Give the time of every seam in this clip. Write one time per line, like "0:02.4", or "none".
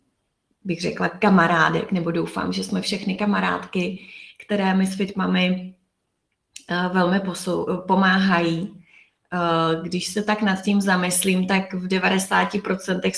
none